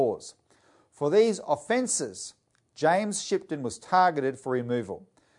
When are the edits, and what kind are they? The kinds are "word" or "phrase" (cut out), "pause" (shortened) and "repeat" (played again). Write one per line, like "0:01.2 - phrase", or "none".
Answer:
none